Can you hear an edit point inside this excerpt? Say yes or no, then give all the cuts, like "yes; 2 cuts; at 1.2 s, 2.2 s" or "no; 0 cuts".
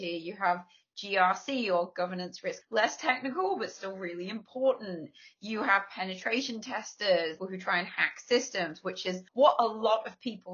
yes; 3 cuts; at 2.6 s, 7.4 s, 9.3 s